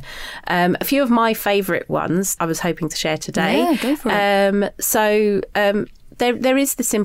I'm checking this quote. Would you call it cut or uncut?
cut